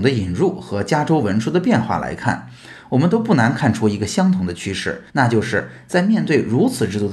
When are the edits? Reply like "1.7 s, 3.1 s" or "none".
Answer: 5.1 s